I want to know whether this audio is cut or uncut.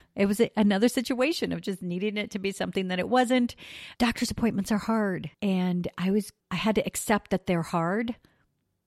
cut